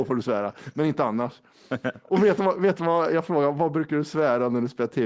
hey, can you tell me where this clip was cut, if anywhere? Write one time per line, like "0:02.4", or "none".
none